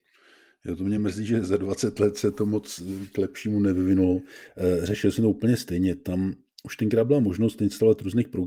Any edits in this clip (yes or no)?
no